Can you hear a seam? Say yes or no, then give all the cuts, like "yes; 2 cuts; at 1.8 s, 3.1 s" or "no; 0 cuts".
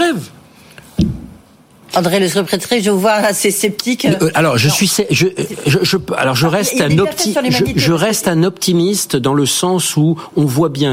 no; 0 cuts